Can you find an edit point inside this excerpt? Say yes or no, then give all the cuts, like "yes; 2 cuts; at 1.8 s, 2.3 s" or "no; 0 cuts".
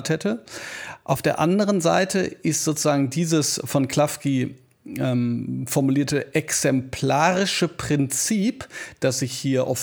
no; 0 cuts